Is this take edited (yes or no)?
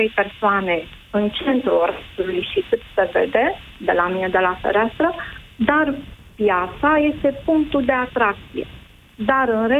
no